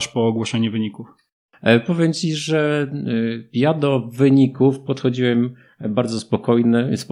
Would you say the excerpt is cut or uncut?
uncut